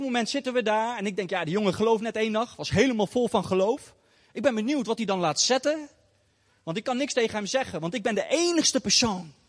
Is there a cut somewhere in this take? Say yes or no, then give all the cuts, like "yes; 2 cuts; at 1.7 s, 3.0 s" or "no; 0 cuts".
no; 0 cuts